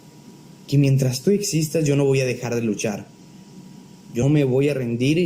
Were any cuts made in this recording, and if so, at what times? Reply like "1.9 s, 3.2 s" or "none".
4.2 s